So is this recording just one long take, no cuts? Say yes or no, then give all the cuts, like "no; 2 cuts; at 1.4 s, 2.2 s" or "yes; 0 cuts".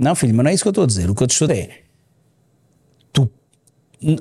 no; 1 cut; at 1.5 s